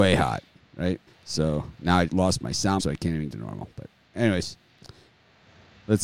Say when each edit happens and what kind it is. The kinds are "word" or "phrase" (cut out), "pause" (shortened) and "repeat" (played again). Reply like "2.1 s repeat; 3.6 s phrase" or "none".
1.1 s pause; 2.1 s word; 2.8 s word; 3.3 s phrase